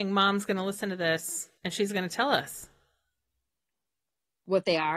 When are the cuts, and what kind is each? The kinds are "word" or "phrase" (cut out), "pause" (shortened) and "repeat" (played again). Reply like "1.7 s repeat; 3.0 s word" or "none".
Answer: 1.6 s pause